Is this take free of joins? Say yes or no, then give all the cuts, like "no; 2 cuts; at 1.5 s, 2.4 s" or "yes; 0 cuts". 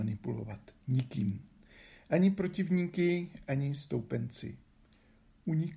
yes; 0 cuts